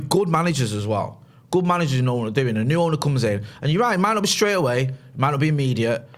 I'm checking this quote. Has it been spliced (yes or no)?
no